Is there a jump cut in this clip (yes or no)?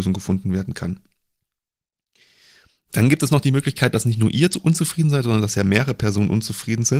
no